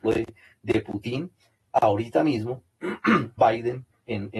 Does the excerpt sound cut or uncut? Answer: uncut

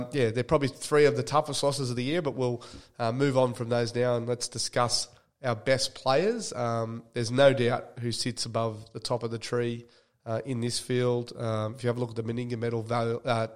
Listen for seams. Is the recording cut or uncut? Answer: uncut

